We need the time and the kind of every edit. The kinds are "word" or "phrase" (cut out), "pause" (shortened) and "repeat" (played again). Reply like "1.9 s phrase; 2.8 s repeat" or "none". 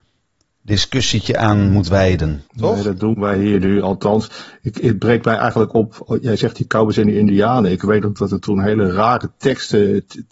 2.5 s pause